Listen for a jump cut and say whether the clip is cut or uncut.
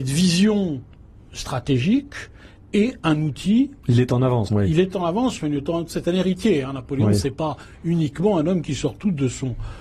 cut